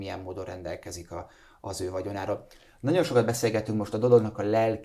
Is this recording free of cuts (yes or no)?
yes